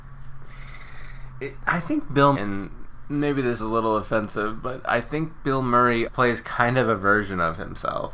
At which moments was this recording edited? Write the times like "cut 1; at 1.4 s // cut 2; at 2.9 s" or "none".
cut 1; at 2.3 s // cut 2; at 3.6 s // cut 3; at 6.1 s